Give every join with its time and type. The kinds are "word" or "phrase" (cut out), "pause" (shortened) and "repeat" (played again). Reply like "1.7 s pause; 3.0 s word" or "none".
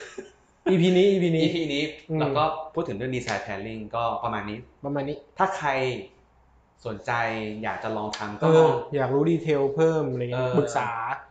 none